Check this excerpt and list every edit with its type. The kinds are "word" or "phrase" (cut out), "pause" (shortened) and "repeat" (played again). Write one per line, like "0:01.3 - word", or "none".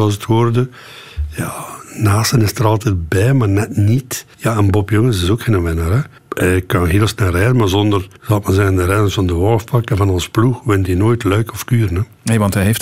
0:04.3 - pause
0:06.2 - pause
0:08.2 - pause

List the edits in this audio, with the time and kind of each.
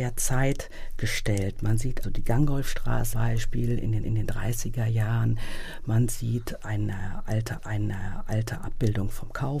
0:02.0 - word
0:03.1 - word
0:04.0 - repeat
0:07.6 - repeat

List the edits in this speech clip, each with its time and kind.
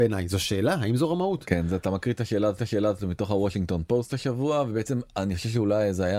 0:02.6 - repeat

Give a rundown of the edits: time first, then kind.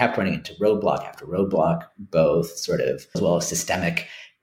0:03.1 - word

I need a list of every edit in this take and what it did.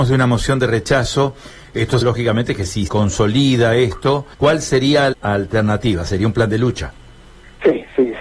0:02.0 - word
0:02.9 - word
0:04.3 - pause
0:05.1 - word

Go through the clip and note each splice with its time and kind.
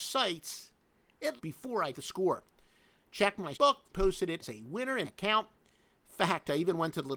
0:01.4 - word
0:01.9 - word
0:03.5 - word
0:03.9 - word
0:04.4 - word
0:05.0 - word

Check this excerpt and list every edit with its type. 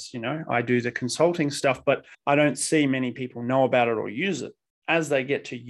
0:02.1 - pause

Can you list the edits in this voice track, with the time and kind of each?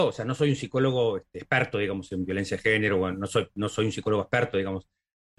none

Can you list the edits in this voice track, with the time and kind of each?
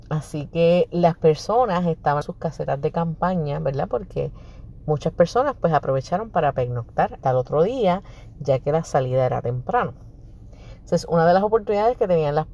0:02.2 - word
0:07.2 - word

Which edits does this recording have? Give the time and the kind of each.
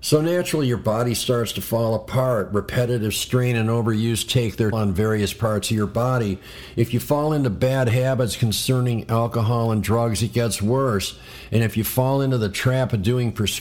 0:04.7 - word

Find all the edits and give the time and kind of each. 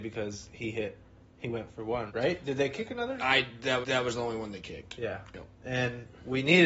0:01.2 - pause
0:01.7 - word
0:02.1 - word
0:03.8 - repeat
0:05.5 - pause

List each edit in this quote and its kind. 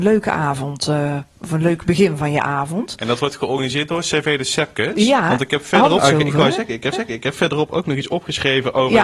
0:06.0 - word
0:06.9 - repeat

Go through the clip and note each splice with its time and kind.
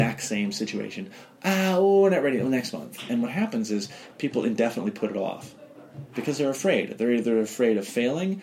none

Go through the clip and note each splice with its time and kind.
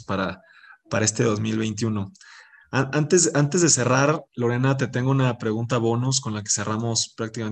0:04.3 - pause

